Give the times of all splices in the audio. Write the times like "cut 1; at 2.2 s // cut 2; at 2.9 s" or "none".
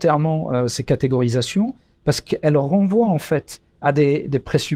none